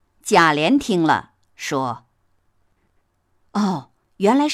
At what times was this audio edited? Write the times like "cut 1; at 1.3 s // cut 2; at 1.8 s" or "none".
none